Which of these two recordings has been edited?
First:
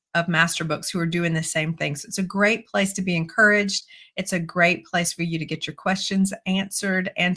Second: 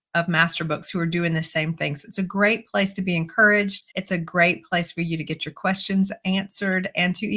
second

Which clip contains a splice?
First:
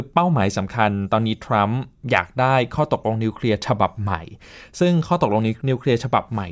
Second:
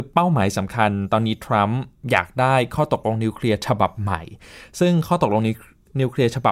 first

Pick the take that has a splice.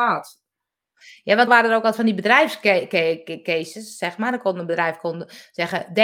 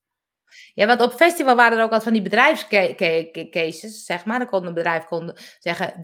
first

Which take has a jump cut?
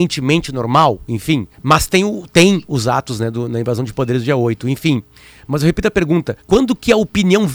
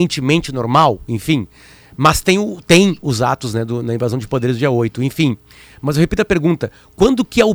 first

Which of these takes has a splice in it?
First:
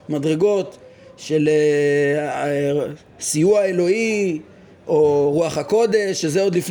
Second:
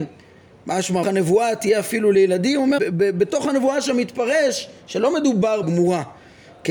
second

